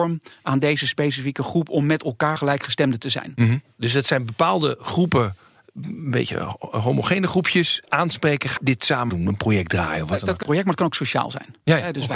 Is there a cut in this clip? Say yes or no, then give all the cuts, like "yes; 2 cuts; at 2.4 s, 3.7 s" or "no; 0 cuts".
yes; 4 cuts; at 2.4 s, 8.6 s, 9.1 s, 10.4 s